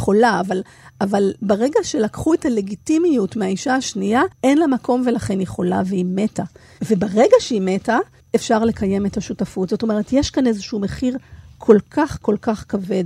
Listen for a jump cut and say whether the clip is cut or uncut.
cut